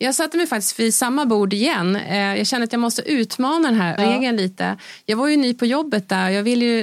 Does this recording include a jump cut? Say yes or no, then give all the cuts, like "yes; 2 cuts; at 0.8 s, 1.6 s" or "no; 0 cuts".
yes; 1 cut; at 4.0 s